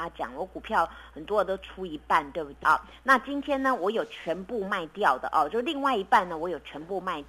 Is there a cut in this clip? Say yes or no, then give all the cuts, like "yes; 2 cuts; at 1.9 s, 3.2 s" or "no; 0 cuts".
yes; 1 cut; at 2.6 s